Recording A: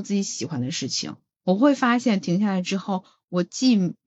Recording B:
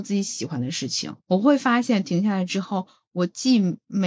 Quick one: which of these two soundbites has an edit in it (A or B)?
B